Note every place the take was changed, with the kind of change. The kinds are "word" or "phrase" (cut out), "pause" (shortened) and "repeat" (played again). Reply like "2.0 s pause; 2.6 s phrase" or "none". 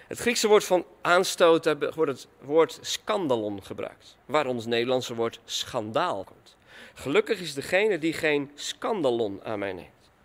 2.4 s word; 6.2 s word